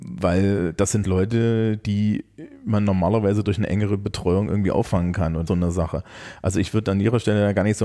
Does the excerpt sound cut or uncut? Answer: cut